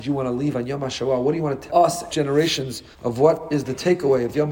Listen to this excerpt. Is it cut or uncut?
cut